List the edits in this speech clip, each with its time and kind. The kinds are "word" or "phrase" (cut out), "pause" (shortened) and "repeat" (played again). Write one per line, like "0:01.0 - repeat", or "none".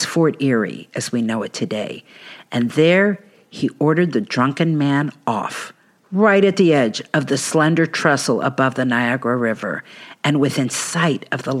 none